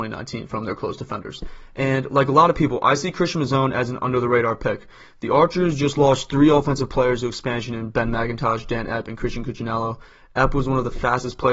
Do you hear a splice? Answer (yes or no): no